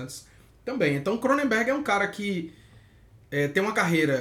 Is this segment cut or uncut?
uncut